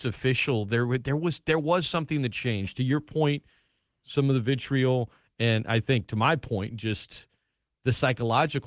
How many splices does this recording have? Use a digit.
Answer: 0